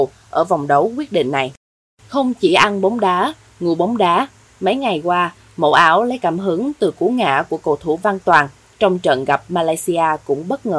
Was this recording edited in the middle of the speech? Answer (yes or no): no